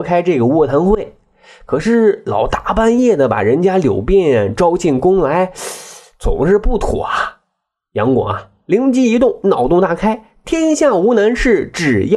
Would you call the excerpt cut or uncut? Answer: uncut